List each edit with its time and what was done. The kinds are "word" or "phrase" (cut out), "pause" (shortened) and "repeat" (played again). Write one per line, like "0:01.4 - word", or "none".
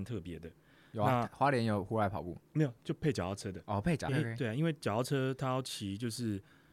0:04.1 - phrase